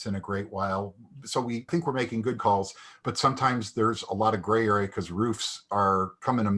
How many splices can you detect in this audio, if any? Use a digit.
2